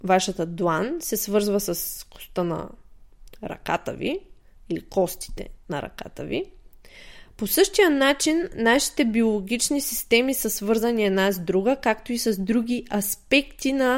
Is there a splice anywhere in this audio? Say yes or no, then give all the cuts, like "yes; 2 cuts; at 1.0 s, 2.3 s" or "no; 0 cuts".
no; 0 cuts